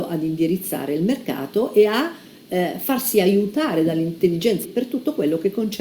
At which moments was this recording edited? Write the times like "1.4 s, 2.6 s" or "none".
4.6 s

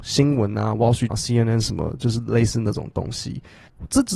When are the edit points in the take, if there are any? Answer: 1.1 s

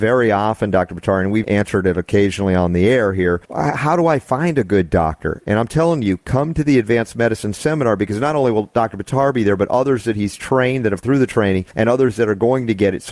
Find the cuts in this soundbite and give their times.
1.4 s, 3.4 s, 11.0 s, 11.7 s

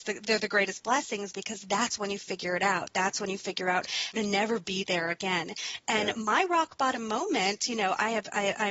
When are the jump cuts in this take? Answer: 4.1 s

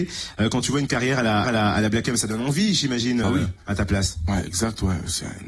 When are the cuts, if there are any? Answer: 1.4 s, 3.2 s

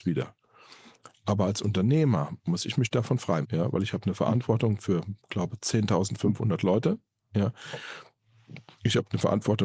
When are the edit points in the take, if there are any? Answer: 3.4 s, 5.2 s

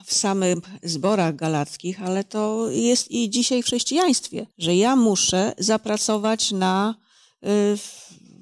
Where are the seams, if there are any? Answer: 4.5 s

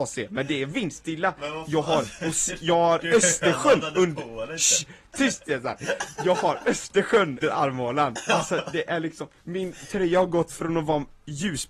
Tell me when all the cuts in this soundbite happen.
7.4 s, 9.4 s

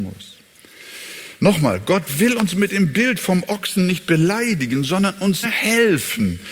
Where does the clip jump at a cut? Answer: 5.4 s

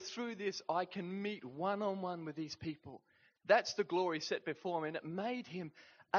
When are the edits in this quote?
none

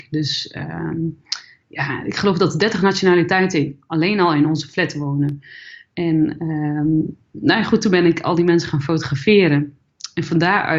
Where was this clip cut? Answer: none

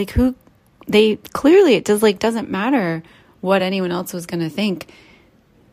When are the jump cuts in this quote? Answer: none

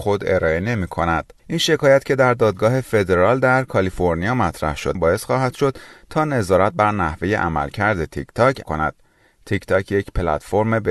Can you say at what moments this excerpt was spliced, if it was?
1.4 s, 4.9 s, 8.6 s

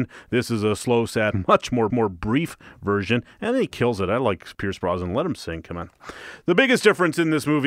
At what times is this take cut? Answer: 1.3 s, 1.9 s, 4.5 s

